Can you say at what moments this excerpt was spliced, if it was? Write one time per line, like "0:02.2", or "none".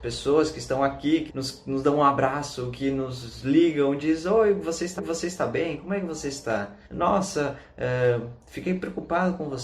0:01.3
0:05.0
0:06.8